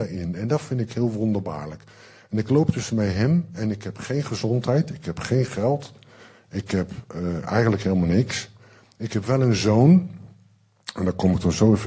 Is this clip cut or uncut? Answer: uncut